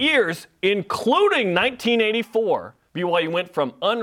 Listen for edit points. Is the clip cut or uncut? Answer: cut